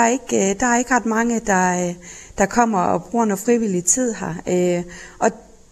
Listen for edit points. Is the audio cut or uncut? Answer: uncut